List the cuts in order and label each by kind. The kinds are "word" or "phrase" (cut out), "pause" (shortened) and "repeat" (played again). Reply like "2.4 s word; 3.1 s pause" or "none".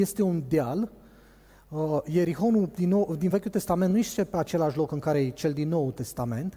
none